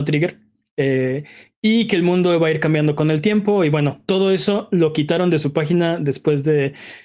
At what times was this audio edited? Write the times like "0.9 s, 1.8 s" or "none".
none